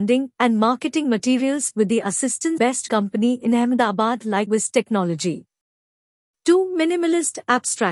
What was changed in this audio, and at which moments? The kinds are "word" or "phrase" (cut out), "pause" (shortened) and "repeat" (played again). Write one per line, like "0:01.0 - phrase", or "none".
0:02.6 - word
0:02.9 - phrase
0:04.5 - word